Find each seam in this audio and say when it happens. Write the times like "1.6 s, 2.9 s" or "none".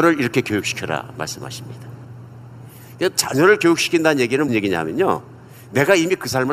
4.5 s